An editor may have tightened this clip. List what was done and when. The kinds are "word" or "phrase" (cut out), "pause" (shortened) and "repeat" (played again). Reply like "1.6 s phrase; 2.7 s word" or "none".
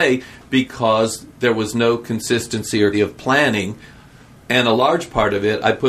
2.9 s word